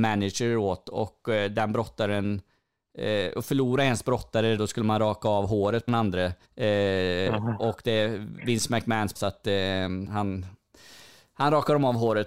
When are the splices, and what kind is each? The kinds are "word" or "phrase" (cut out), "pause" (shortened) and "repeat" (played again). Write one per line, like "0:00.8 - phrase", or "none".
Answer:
0:04.6 - word
0:05.9 - word
0:06.4 - pause
0:09.2 - phrase
0:10.1 - word